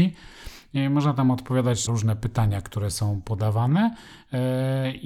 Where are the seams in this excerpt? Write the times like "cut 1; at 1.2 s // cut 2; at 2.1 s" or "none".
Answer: cut 1; at 1.9 s